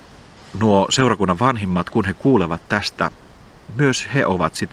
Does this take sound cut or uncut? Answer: uncut